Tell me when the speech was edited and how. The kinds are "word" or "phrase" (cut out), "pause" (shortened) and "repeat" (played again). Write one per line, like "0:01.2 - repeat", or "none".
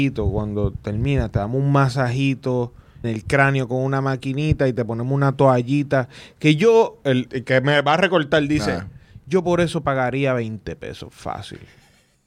0:03.0 - word
0:07.3 - word